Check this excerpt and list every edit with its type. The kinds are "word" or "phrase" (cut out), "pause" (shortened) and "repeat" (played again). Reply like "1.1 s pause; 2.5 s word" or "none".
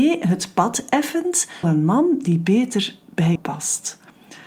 1.6 s word; 3.4 s word

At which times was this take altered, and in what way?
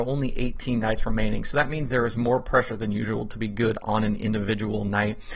none

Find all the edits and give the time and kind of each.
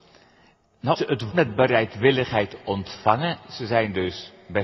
0.9 s word; 1.3 s word

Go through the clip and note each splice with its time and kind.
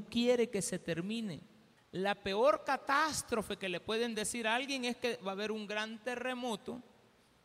1.8 s pause

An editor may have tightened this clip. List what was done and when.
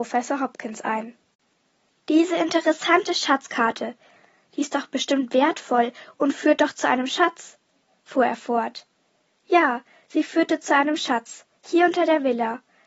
none

